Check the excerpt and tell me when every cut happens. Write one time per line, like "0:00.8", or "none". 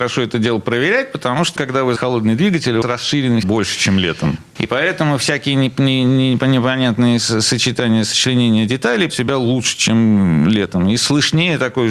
0:01.6
0:02.0
0:02.8
0:03.4
0:09.1